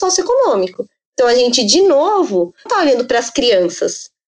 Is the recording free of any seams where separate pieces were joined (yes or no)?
no